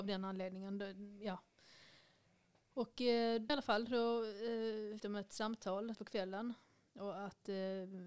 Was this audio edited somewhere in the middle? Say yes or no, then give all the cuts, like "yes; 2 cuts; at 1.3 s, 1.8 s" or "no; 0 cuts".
yes; 3 cuts; at 3.5 s, 5.0 s, 5.9 s